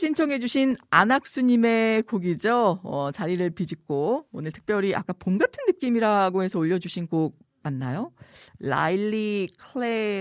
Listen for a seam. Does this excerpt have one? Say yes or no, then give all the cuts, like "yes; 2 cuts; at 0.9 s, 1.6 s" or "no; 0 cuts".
no; 0 cuts